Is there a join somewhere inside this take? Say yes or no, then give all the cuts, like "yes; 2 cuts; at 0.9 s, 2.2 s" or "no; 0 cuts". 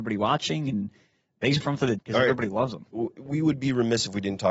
yes; 2 cuts; at 1.6 s, 2.0 s